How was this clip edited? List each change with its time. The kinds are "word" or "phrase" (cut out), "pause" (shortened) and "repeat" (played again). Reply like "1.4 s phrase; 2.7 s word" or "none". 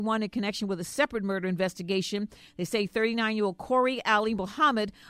none

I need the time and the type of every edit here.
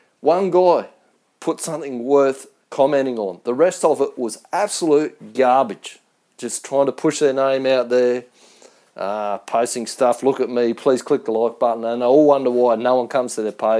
none

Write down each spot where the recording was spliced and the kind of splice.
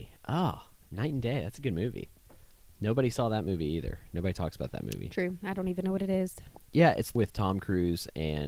7.1 s word

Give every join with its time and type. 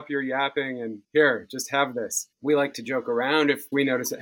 1.0 s pause; 2.3 s pause

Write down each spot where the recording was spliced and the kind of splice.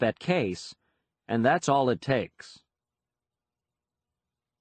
none

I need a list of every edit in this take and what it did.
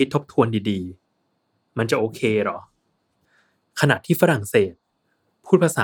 none

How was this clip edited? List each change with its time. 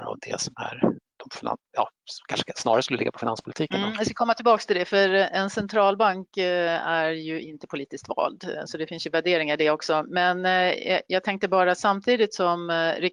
none

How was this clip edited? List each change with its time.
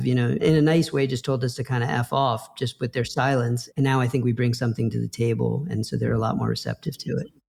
none

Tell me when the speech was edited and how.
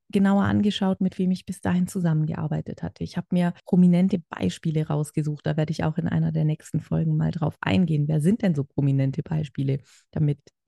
3.6 s pause

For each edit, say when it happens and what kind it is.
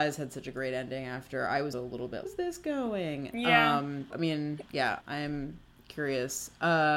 1.7 s word; 2.2 s phrase; 4.1 s word; 5.0 s word

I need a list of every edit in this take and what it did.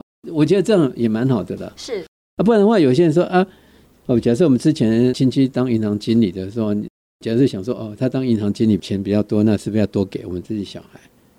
none

